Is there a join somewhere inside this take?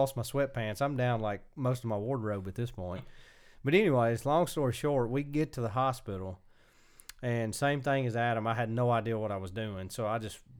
no; 0 cuts

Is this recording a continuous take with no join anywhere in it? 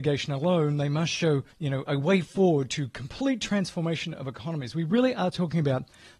no; 1 cut; at 1.5 s

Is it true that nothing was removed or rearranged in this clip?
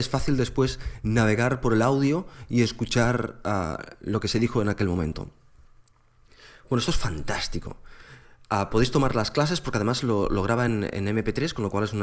yes; 0 cuts

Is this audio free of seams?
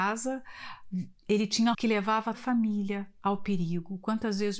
no; 3 cuts; at 1.2 s, 1.7 s, 2.3 s

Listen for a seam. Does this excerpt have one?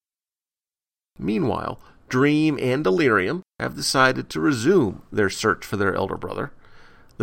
yes; 1 cut; at 3.5 s

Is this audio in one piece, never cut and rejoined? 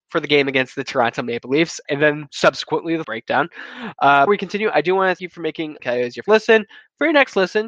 no; 6 cuts; at 1.8 s, 3.0 s, 4.3 s, 5.2 s, 5.8 s, 6.2 s

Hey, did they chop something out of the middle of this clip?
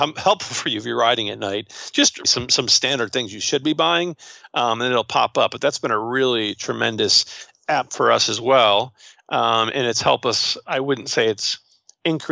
yes; 1 cut; at 2.2 s

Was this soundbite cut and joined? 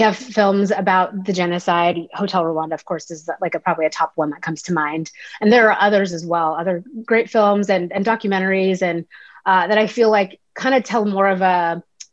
no; 0 cuts

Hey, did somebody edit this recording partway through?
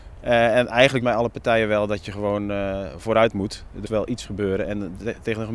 yes; 2 cuts; at 1.0 s, 3.8 s

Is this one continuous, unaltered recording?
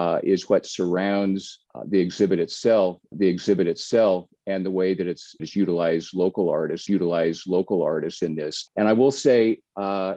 no; 5 cuts; at 1.7 s, 3.1 s, 5.4 s, 6.9 s, 8.7 s

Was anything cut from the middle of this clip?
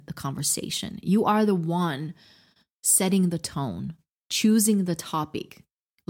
no; 0 cuts

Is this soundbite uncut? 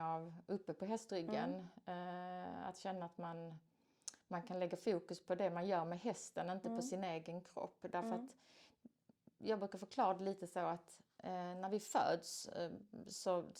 yes; 0 cuts

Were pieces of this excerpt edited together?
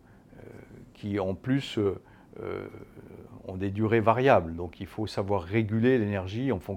no; 0 cuts

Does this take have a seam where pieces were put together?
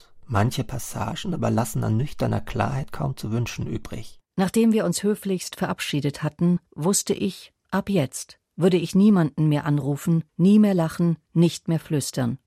yes; 6 cuts; at 4.3 s, 6.7 s, 7.6 s, 8.4 s, 10.3 s, 11.3 s

